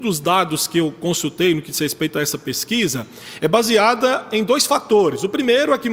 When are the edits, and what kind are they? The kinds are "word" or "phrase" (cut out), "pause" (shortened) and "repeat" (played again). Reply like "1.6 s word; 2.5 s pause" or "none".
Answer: none